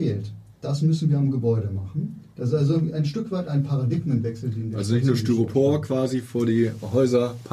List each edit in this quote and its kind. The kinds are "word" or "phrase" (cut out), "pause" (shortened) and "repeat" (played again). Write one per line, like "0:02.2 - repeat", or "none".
none